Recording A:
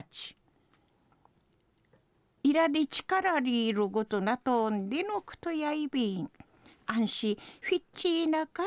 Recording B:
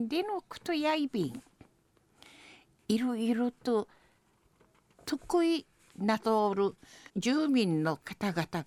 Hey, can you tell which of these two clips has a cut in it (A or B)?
B